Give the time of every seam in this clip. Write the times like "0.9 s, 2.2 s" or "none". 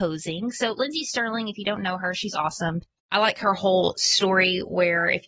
none